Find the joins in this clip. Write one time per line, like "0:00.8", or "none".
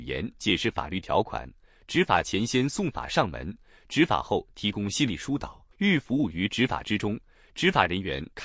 0:05.7